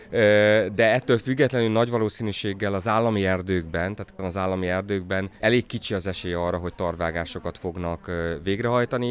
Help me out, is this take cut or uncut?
cut